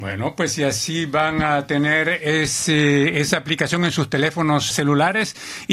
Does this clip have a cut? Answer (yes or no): yes